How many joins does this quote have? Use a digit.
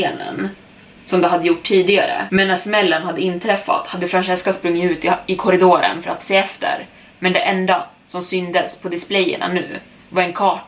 0